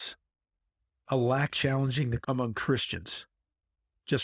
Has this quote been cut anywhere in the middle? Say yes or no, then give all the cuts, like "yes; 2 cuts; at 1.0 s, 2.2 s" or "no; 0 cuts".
yes; 2 cuts; at 1.5 s, 2.2 s